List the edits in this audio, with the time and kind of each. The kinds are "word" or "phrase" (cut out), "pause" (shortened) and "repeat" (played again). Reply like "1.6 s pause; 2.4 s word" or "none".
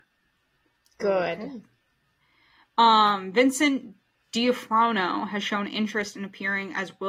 none